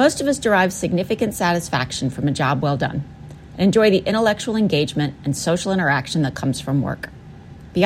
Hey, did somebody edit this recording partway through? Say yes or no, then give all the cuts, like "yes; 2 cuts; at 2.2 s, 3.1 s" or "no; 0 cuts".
no; 0 cuts